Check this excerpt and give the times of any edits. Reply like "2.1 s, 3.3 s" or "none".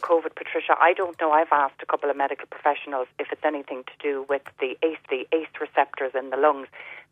5.0 s